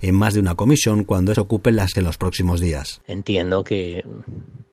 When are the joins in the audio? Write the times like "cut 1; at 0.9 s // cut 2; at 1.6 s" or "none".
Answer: cut 1; at 1.3 s // cut 2; at 1.9 s